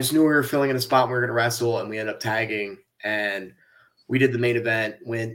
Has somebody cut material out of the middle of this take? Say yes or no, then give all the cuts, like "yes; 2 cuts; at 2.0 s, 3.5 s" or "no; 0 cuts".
no; 0 cuts